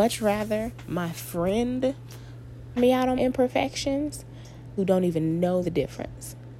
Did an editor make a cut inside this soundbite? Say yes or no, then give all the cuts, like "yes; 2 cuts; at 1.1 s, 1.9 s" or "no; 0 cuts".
yes; 4 cuts; at 2.8 s, 3.2 s, 4.8 s, 5.6 s